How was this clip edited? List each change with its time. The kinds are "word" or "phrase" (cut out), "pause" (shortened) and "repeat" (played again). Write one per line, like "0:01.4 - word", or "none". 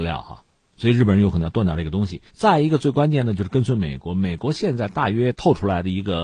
0:02.3 - pause